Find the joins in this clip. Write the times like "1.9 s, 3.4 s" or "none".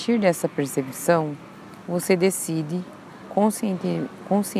none